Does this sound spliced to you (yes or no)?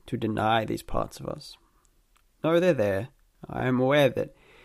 no